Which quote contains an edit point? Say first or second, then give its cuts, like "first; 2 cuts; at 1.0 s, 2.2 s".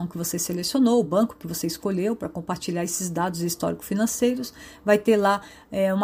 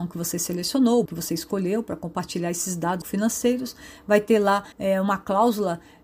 second; 3 cuts; at 1.1 s, 3.0 s, 4.7 s